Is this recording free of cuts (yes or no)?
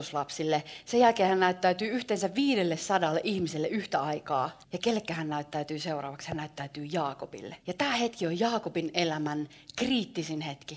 no